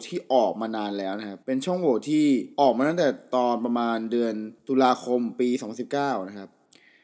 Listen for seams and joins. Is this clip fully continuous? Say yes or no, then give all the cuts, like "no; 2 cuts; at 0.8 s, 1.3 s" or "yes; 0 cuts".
no; 3 cuts; at 1.4 s, 2.5 s, 4.6 s